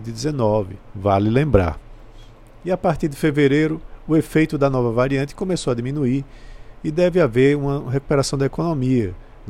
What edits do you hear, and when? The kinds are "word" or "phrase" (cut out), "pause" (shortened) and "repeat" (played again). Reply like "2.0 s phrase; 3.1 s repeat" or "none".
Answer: none